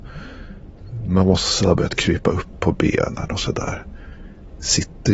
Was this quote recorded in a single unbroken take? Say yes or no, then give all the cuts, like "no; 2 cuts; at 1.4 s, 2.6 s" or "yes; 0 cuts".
yes; 0 cuts